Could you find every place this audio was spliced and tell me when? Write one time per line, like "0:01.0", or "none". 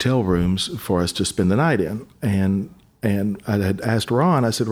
none